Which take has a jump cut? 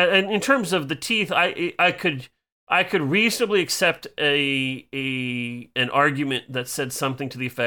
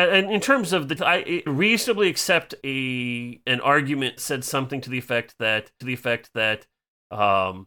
second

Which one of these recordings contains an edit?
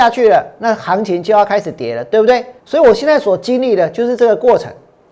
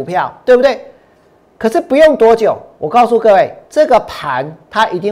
first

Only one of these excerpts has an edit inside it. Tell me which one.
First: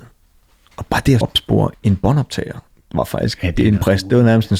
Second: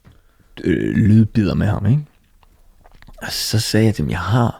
first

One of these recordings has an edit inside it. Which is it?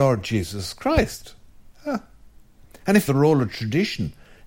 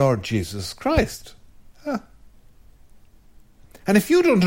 first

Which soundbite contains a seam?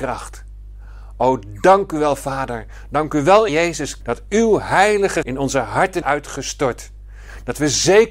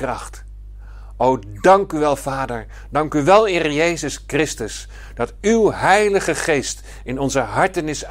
first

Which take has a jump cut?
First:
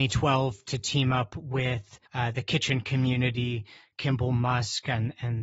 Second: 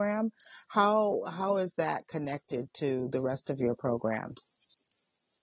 first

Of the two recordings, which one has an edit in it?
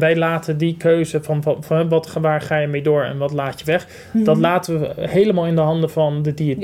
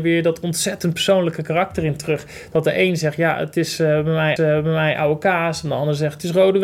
second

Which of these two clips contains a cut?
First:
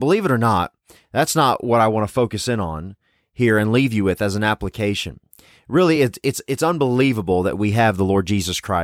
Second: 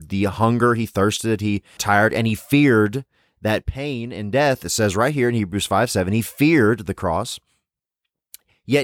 second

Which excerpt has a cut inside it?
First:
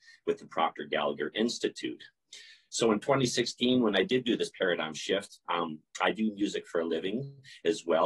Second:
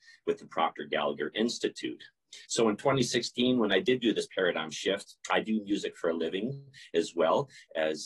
second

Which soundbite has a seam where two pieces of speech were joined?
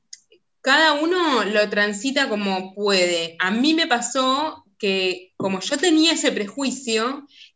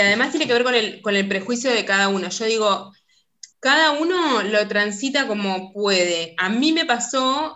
second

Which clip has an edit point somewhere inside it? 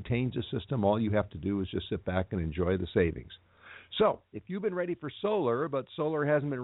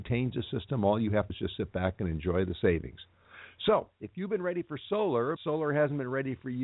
second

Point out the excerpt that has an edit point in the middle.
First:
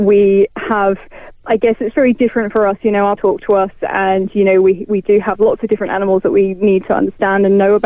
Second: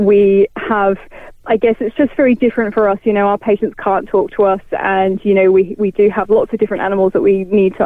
first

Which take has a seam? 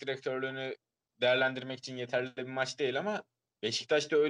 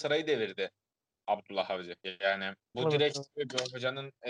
second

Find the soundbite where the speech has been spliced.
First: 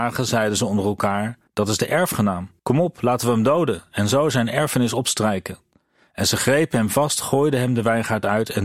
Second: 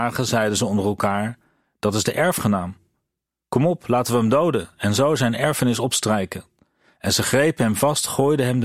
first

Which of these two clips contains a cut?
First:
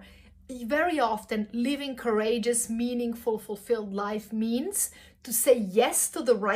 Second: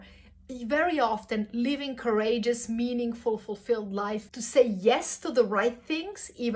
second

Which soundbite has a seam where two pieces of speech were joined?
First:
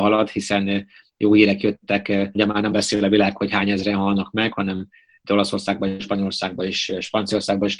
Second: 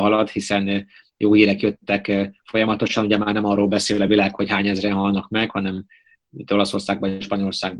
first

